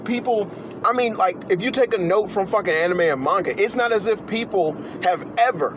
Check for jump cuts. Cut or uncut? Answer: uncut